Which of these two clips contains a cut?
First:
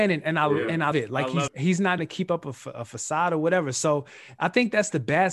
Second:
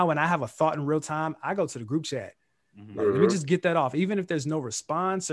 first; 3 cuts; at 0.9 s, 1.5 s, 2.0 s

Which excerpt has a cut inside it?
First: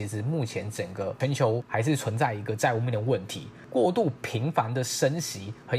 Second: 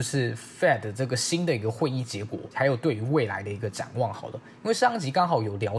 second; 1 cut; at 2.5 s

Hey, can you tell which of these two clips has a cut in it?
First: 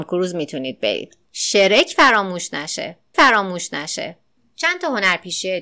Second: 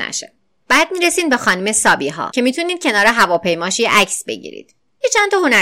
first; 2 cuts; at 1.2 s, 3.1 s

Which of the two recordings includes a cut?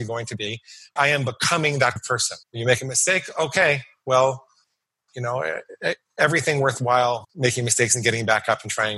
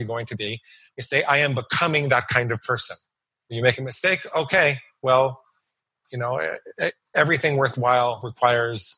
first; 4 cuts; at 1.0 s, 2.0 s, 2.4 s, 7.2 s

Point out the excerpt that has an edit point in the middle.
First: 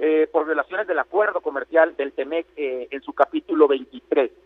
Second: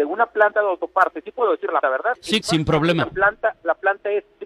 second; 2 cuts; at 1.8 s, 2.4 s

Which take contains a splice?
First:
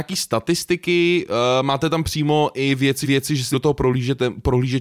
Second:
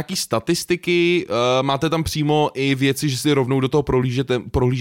first; 2 cuts; at 3.0 s, 3.5 s

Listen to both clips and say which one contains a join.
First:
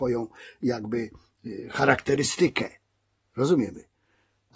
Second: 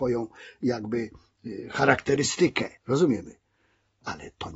second; 1 cut; at 2.8 s

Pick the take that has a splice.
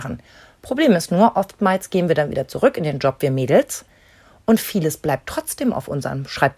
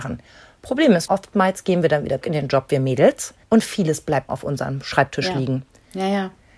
second; 5 cuts; at 1.1 s, 2.2 s, 3.4 s, 4.3 s, 5.7 s

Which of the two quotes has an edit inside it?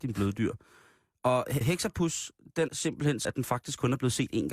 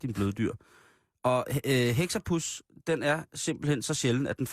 first; 3 cuts; at 1.6 s, 2.7 s, 3.2 s

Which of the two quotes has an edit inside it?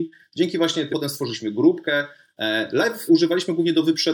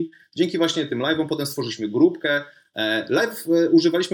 first; 2 cuts; at 0.9 s, 3.1 s

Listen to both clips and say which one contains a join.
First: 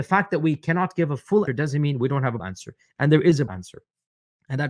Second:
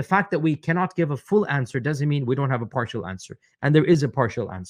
first; 3 cuts; at 1.5 s, 2.4 s, 3.5 s

